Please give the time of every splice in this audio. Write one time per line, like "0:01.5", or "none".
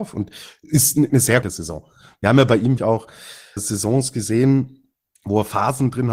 0:01.1
0:01.4
0:02.8
0:03.6